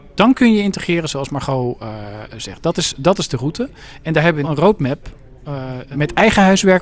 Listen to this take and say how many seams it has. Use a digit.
2